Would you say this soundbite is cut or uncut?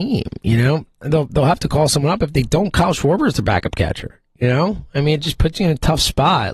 uncut